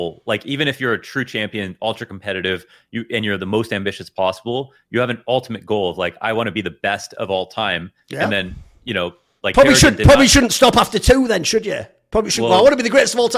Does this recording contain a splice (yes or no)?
no